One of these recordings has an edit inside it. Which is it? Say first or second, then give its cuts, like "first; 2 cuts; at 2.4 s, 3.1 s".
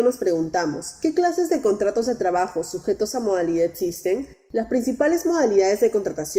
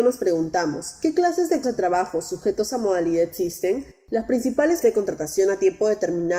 second; 2 cuts; at 1.6 s, 4.8 s